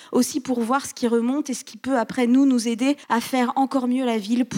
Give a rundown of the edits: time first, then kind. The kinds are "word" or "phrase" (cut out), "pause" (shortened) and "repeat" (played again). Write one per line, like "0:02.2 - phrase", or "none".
0:03.0 - pause